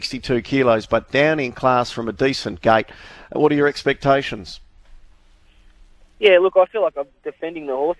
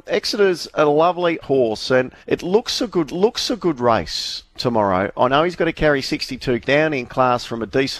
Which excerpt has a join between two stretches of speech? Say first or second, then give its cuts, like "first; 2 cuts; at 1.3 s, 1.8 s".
second; 4 cuts; at 1.4 s, 2.2 s, 3.1 s, 6.6 s